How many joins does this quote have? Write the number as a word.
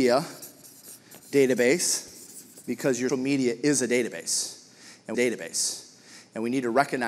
three